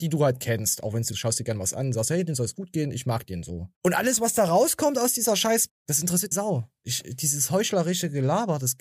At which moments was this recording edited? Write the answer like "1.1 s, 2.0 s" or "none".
1.1 s, 3.7 s, 5.7 s, 6.3 s